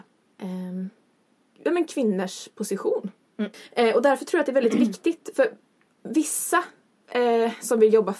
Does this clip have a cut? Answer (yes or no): no